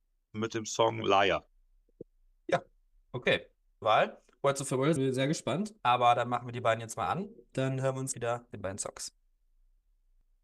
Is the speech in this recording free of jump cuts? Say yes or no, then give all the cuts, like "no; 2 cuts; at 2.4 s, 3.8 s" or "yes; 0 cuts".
no; 6 cuts; at 3.8 s, 5.0 s, 5.8 s, 7.5 s, 8.1 s, 8.5 s